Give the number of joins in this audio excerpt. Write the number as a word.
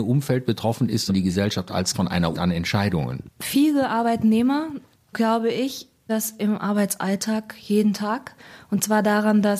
five